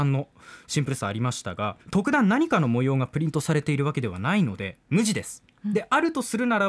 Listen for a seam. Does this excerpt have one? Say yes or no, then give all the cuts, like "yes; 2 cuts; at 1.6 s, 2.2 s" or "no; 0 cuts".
yes; 1 cut; at 1.8 s